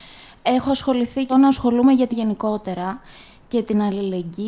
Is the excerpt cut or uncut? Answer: cut